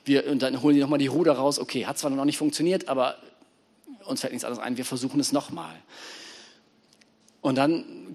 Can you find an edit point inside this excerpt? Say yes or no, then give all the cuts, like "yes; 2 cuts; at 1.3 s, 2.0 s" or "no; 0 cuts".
no; 0 cuts